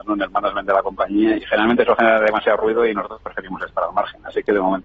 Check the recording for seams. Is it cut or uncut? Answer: cut